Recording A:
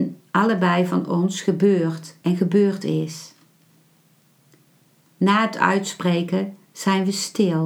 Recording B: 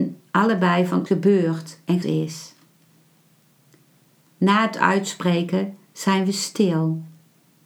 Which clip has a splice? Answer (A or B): B